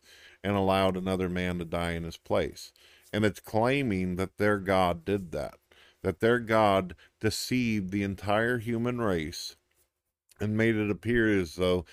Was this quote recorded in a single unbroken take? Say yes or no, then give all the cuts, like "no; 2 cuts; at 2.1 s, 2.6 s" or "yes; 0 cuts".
yes; 0 cuts